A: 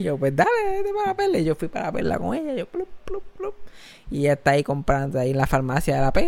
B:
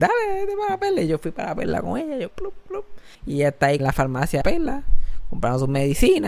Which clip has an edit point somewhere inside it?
B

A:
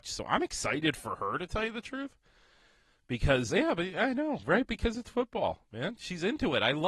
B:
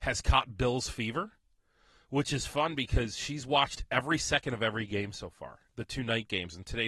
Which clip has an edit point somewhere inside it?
A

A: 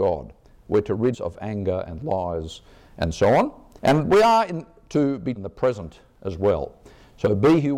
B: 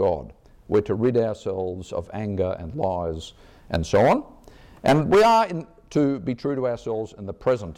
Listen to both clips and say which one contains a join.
A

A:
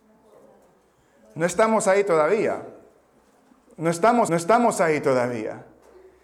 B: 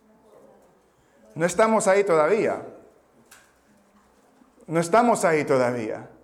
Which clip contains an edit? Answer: A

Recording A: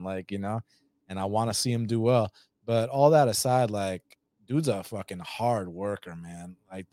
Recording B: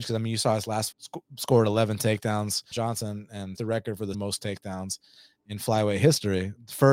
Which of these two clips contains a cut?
B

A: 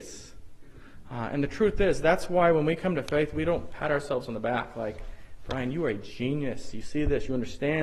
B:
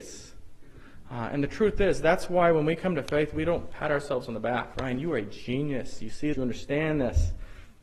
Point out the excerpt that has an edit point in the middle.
B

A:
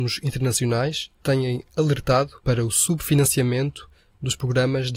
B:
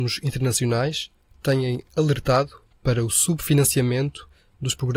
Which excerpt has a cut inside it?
A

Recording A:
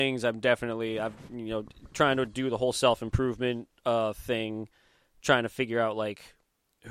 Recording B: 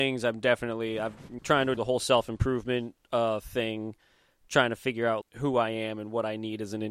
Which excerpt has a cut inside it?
B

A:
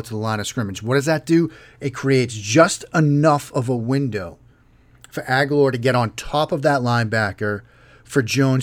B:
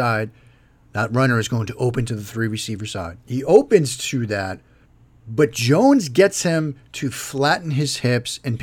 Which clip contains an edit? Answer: B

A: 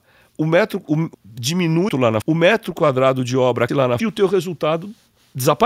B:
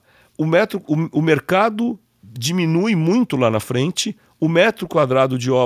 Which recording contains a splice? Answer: A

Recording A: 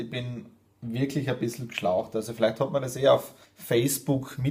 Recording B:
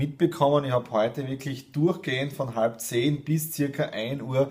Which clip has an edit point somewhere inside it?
A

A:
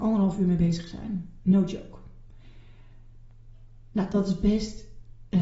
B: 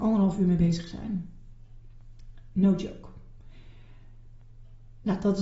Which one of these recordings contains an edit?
A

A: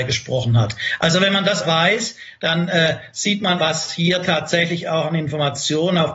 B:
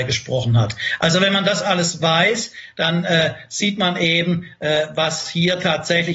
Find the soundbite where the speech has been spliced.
A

